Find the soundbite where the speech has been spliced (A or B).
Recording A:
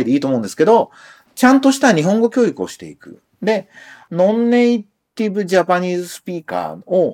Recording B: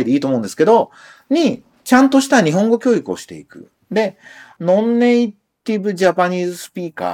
A